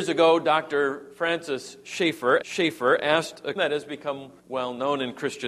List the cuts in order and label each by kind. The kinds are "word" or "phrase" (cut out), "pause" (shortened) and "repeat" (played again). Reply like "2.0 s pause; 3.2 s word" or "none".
2.4 s repeat; 3.6 s word; 4.4 s pause